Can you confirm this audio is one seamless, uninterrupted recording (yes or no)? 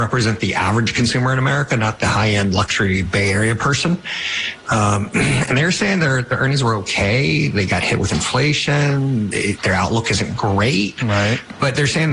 yes